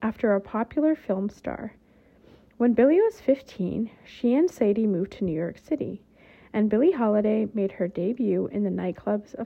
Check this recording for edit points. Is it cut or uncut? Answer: uncut